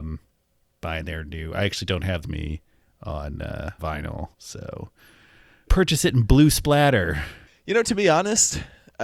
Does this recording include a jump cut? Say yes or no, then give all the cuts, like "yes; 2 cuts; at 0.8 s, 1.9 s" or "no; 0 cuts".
yes; 5 cuts; at 2.2 s, 3.8 s, 4.3 s, 5.7 s, 7.5 s